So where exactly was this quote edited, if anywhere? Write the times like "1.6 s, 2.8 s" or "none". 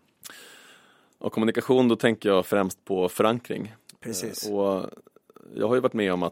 none